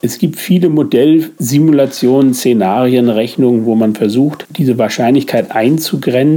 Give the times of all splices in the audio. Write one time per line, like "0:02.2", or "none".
none